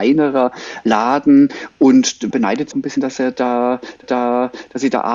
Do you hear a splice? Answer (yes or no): yes